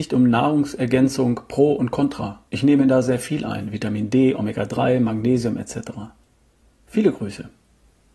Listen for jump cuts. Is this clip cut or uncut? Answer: cut